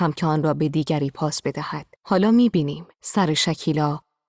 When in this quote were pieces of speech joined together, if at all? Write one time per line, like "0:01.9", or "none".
0:01.9
0:02.9